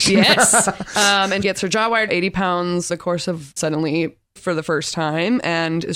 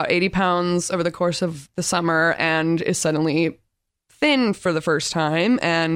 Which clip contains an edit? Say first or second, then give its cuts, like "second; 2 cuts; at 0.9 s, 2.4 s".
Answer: first; 5 cuts; at 1.4 s, 2.1 s, 2.9 s, 3.6 s, 4.4 s